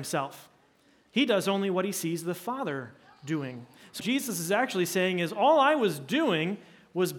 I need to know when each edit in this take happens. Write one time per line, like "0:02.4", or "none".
0:04.0